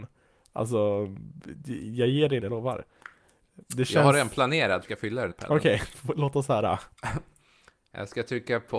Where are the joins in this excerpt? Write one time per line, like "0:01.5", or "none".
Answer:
0:02.4
0:03.7
0:04.8
0:05.3
0:06.9